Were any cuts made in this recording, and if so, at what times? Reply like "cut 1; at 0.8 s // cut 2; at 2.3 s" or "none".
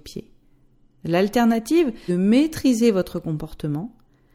cut 1; at 2.1 s